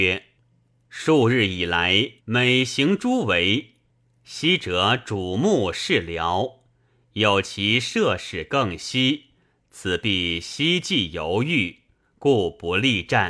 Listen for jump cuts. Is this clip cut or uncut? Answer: cut